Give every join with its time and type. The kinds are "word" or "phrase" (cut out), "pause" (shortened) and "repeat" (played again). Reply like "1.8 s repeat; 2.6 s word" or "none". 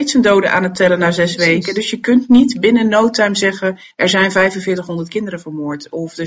3.9 s pause